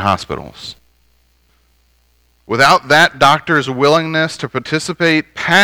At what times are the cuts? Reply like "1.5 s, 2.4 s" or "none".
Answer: none